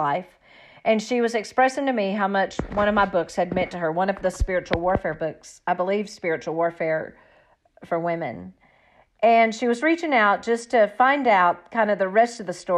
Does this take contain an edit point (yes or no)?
no